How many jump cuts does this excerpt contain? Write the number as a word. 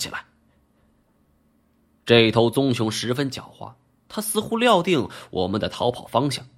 zero